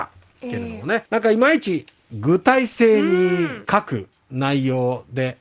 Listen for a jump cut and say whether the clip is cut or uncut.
cut